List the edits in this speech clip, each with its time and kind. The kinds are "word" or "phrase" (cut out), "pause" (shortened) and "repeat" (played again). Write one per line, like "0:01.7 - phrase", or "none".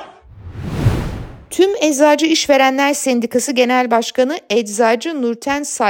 none